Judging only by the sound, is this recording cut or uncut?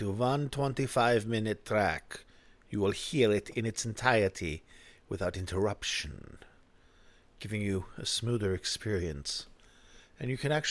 uncut